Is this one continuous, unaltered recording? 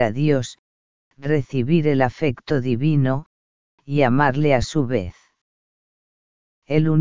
yes; 0 cuts

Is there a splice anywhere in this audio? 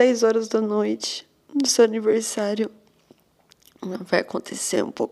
no; 0 cuts

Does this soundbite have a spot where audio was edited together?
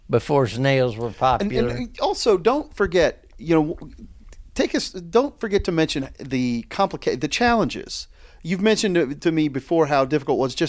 no; 0 cuts

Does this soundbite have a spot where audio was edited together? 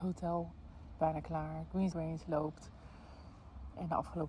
yes; 2 cuts; at 1.0 s, 1.9 s

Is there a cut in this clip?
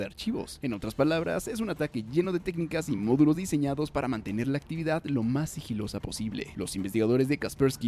no; 0 cuts

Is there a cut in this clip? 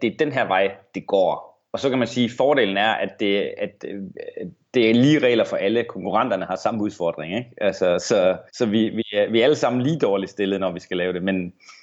yes; 1 cut; at 8.5 s

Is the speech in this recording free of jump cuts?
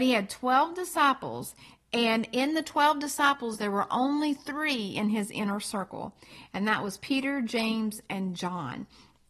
yes; 0 cuts

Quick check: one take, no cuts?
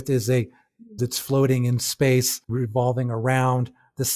no; 2 cuts; at 1.0 s, 2.5 s

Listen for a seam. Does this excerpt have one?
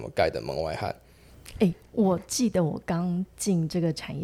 no; 0 cuts

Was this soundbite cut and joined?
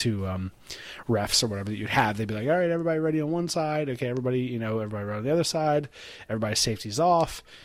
no; 0 cuts

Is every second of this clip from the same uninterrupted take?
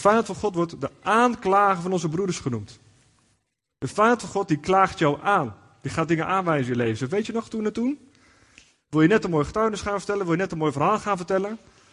yes; 0 cuts

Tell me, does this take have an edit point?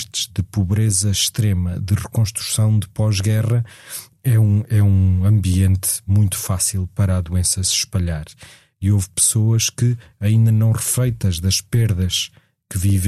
no; 0 cuts

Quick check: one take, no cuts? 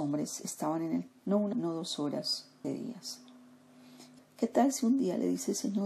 no; 4 cuts; at 1.1 s, 1.5 s, 2.6 s, 4.2 s

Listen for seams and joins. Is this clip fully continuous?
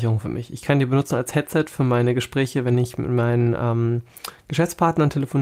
yes; 0 cuts

